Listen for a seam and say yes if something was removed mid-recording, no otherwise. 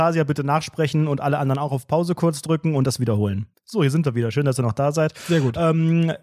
yes